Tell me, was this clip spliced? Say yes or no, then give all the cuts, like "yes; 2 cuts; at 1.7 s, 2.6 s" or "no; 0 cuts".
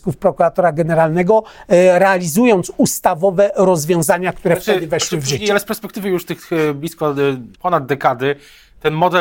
yes; 1 cut; at 7.5 s